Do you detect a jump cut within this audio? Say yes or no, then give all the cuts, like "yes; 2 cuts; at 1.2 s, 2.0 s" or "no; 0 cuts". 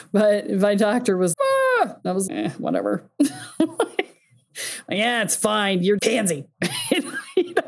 yes; 3 cuts; at 1.3 s, 2.3 s, 6.0 s